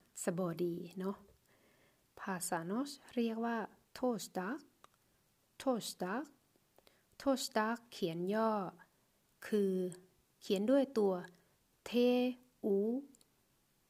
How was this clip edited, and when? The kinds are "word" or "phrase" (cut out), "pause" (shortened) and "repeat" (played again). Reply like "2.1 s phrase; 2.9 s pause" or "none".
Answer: none

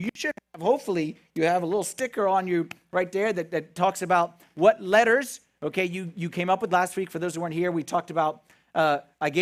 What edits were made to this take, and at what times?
none

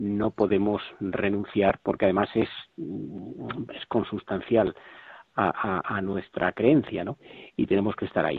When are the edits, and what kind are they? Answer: none

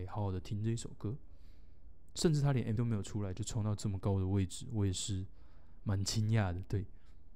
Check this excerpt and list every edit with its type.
2.8 s word

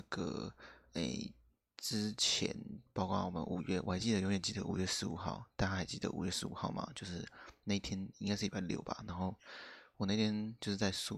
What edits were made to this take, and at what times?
none

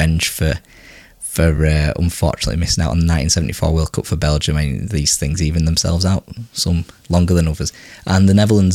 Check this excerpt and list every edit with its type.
none

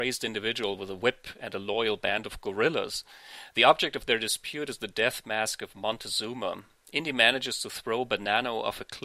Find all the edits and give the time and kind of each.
none

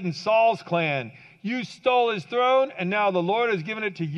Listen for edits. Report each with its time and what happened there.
none

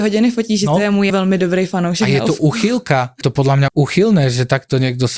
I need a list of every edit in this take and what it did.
1.1 s word; 3.2 s word; 3.7 s word

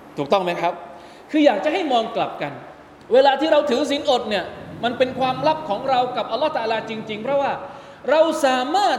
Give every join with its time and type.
3.0 s pause

